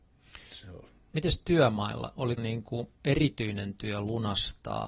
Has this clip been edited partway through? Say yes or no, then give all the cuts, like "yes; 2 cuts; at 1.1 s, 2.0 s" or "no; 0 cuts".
yes; 2 cuts; at 2.4 s, 2.9 s